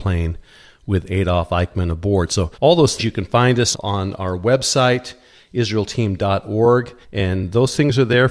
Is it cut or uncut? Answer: cut